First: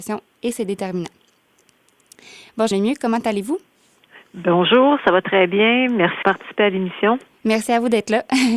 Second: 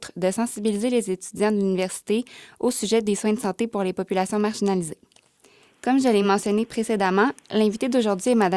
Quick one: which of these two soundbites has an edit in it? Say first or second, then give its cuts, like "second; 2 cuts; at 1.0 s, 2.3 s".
first; 2 cuts; at 2.7 s, 6.2 s